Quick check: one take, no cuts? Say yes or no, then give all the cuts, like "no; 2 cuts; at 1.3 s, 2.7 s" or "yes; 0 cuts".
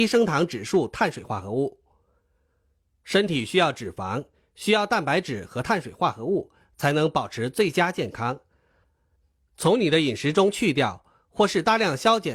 yes; 0 cuts